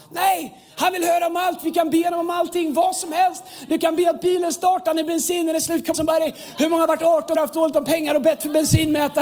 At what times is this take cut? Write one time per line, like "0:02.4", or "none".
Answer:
0:05.9
0:07.3